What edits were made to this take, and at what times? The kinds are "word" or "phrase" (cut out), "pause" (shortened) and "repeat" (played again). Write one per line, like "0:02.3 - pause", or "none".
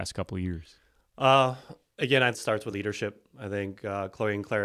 0:01.9 - pause
0:02.3 - phrase
0:02.7 - word